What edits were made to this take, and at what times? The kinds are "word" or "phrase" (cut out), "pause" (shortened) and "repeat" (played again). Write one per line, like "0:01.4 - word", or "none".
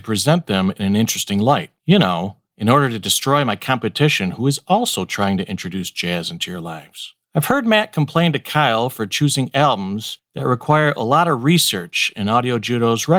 0:01.8 - pause
0:02.4 - pause
0:07.2 - pause